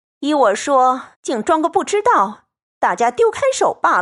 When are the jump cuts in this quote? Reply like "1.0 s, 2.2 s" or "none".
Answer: 1.1 s